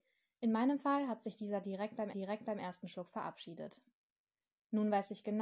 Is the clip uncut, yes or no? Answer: no